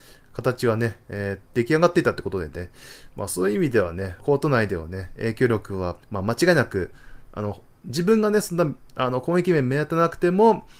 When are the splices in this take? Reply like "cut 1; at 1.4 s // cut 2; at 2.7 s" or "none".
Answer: cut 1; at 4.2 s // cut 2; at 6.0 s